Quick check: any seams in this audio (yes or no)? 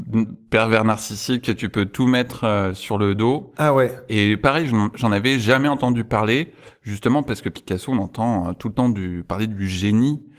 no